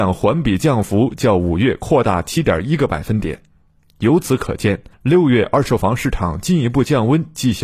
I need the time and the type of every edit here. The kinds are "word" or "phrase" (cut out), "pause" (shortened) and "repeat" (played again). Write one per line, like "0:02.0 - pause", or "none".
0:04.9 - pause